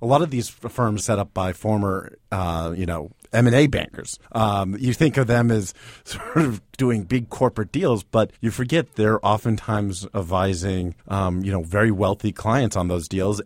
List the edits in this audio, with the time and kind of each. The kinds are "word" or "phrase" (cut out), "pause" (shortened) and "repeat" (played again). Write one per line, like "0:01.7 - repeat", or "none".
0:01.0 - phrase
0:04.2 - pause
0:08.3 - pause
0:11.0 - pause